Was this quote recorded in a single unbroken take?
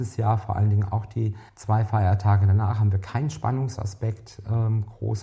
no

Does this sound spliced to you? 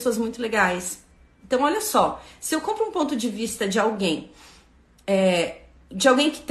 no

